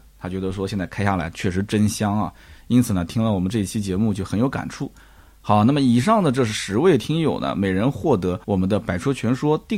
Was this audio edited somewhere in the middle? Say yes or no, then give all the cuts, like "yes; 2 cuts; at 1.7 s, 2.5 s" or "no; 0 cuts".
yes; 1 cut; at 8.4 s